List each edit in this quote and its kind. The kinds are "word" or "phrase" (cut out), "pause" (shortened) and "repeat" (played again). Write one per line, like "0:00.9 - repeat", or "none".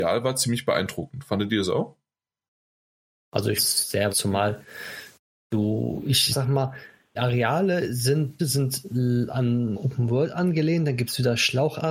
0:03.6 - word
0:04.1 - word
0:06.3 - word
0:07.2 - word
0:08.4 - word
0:09.7 - word